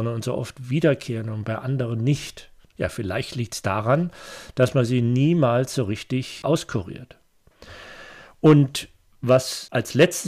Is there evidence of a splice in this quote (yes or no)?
no